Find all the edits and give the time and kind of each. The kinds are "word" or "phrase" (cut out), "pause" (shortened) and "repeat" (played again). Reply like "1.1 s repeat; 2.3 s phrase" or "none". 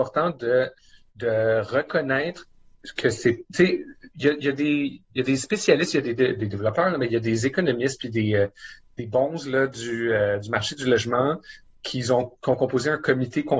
none